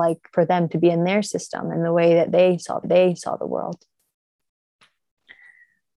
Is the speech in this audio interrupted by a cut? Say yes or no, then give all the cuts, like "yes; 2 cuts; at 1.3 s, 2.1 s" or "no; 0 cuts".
yes; 1 cut; at 2.8 s